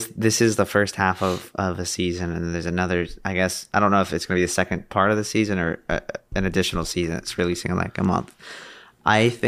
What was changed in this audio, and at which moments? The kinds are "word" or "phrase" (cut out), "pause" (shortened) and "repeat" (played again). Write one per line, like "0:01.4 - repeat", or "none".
none